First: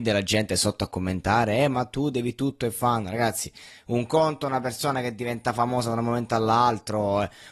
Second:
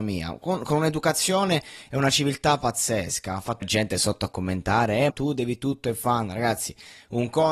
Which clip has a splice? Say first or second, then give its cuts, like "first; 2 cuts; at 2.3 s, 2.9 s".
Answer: second; 2 cuts; at 3.6 s, 5.1 s